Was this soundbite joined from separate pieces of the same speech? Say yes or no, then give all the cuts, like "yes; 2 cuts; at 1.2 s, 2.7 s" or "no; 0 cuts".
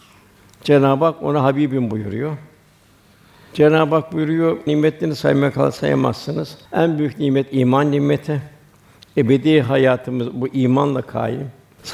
yes; 2 cuts; at 4.7 s, 6.7 s